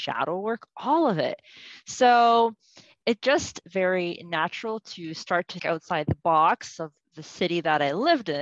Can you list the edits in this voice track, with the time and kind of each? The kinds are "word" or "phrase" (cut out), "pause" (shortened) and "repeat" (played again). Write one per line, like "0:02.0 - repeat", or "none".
0:03.6 - word
0:05.6 - word